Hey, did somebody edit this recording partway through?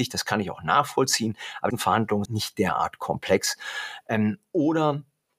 yes; 2 cuts; at 1.7 s, 2.3 s

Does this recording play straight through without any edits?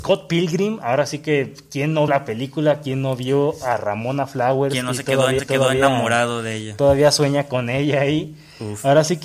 no; 2 cuts; at 2.1 s, 5.4 s

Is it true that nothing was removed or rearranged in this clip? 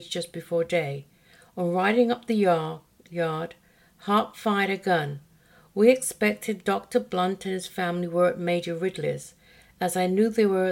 yes; 0 cuts

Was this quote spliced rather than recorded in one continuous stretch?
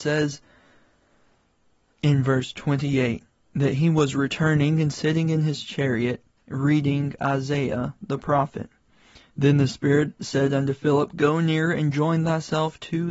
no; 0 cuts

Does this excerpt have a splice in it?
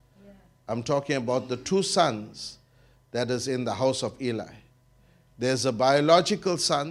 no; 0 cuts

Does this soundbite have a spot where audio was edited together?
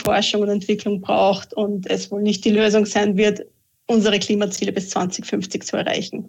no; 0 cuts

